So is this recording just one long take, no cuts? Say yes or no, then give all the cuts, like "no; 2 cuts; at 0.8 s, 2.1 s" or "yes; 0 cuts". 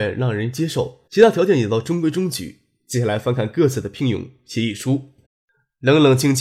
no; 2 cuts; at 1.1 s, 5.2 s